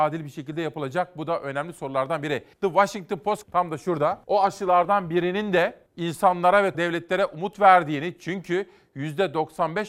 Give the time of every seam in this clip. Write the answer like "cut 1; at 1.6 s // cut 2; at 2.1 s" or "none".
cut 1; at 2.5 s // cut 2; at 3.4 s // cut 3; at 4.2 s // cut 4; at 5.9 s // cut 5; at 6.7 s